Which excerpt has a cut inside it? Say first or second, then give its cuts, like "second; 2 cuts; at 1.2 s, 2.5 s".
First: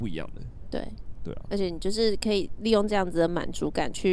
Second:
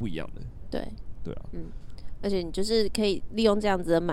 first; 1 cut; at 1.5 s